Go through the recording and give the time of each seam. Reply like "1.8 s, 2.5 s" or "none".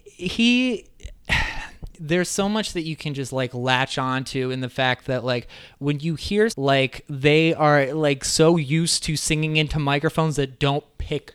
6.5 s